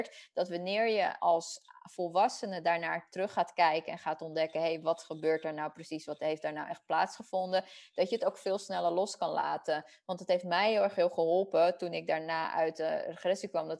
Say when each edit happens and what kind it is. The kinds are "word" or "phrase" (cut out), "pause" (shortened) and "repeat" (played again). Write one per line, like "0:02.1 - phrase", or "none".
0:01.2 - word